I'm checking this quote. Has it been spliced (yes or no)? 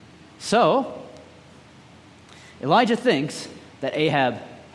no